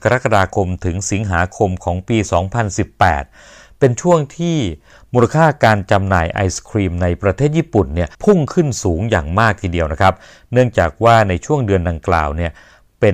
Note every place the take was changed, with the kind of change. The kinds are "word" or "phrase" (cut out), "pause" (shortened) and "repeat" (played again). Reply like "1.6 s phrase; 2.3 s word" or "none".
8.1 s pause